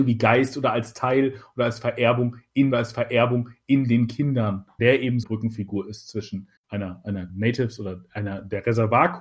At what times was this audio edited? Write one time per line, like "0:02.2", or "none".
0:02.7
0:04.8
0:05.2
0:06.6
0:07.3